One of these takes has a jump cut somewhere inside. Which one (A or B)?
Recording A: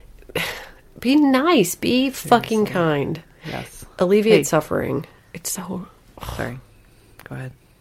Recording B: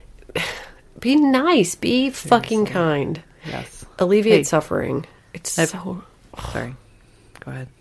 A